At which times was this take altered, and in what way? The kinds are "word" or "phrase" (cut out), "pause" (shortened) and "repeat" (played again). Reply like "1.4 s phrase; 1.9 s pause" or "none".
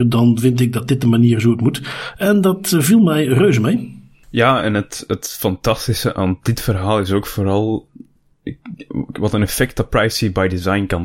none